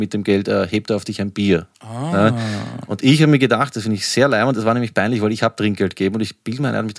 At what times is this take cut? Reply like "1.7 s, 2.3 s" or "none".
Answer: 1.7 s